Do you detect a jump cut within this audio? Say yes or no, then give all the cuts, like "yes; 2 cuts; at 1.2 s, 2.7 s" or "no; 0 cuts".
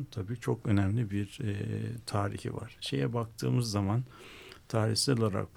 no; 0 cuts